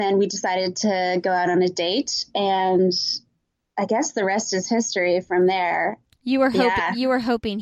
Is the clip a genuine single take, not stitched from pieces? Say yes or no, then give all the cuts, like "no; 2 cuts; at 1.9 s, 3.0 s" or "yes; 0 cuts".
yes; 0 cuts